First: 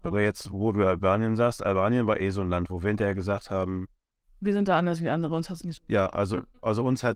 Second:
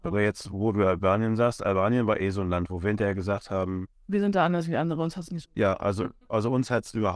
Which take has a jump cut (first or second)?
second